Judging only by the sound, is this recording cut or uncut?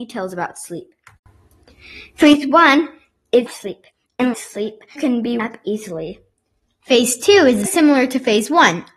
cut